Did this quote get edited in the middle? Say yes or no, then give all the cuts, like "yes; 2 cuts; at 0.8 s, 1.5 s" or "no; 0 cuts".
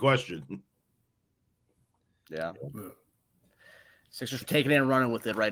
yes; 1 cut; at 4.4 s